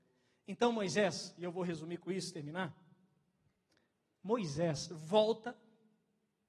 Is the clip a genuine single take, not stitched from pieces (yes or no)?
yes